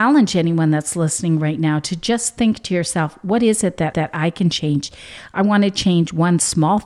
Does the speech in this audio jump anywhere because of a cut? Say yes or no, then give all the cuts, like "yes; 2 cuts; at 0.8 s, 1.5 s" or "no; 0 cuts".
yes; 1 cut; at 3.9 s